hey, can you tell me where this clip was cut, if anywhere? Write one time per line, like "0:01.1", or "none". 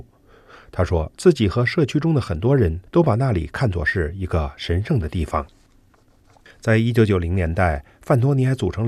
0:02.9